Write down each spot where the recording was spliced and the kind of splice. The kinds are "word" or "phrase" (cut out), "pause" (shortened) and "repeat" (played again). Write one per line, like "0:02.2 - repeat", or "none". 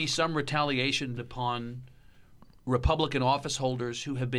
0:01.2 - word

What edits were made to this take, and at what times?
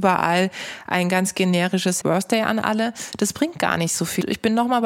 0:02.0 - word

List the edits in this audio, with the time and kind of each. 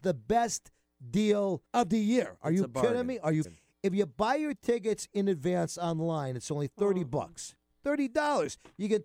0:01.7 - pause
0:03.4 - word

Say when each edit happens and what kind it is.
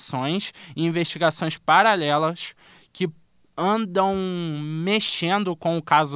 none

